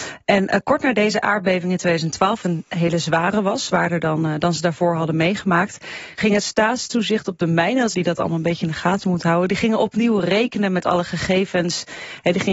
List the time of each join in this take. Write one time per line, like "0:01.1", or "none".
0:02.4
0:07.9